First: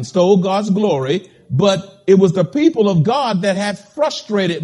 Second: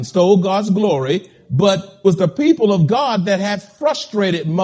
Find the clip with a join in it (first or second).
second